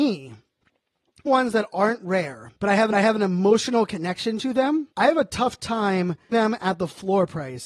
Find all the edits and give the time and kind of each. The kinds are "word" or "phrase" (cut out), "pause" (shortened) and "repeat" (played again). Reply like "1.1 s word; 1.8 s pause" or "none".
1.3 s word; 2.6 s pause; 2.9 s repeat; 4.9 s pause; 6.3 s word